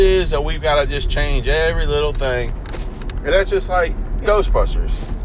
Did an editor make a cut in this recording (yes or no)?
yes